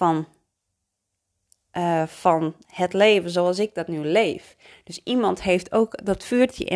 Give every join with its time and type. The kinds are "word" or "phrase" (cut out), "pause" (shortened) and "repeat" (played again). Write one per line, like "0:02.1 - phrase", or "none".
none